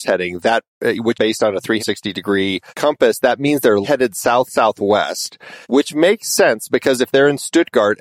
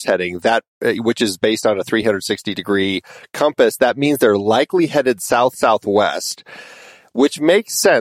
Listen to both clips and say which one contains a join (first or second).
first